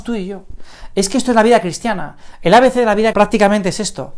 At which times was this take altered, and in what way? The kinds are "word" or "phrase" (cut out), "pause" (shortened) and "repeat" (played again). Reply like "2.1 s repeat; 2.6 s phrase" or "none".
3.1 s word